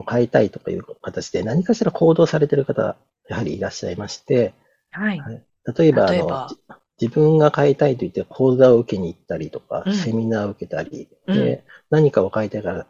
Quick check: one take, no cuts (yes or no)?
yes